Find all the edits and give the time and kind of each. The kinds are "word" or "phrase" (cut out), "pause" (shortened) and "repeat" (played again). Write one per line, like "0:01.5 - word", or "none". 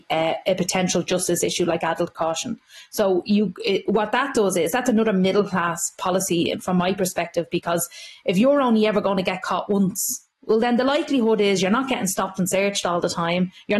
0:10.3 - pause